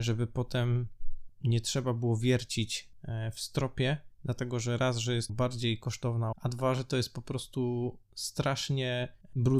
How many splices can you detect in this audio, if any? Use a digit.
2